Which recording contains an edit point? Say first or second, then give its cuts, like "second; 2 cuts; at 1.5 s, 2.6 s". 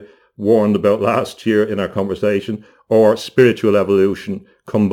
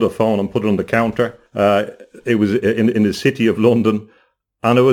second; 1 cut; at 1.5 s